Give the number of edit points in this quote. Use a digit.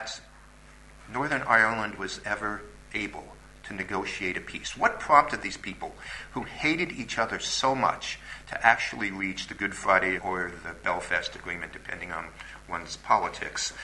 1